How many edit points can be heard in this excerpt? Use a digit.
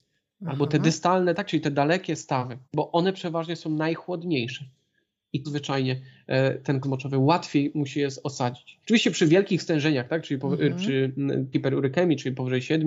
5